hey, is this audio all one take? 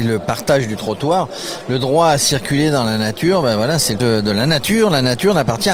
no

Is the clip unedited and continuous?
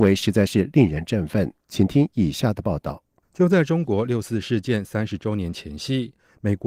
yes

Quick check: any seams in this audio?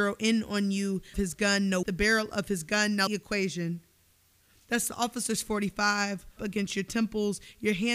yes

